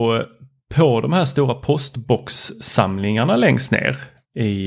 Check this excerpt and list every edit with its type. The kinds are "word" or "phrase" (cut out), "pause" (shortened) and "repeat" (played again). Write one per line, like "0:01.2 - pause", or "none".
none